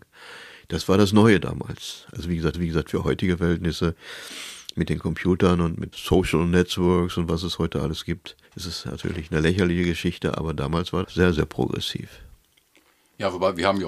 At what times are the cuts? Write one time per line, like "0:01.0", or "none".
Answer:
0:02.5
0:05.9
0:08.4
0:11.0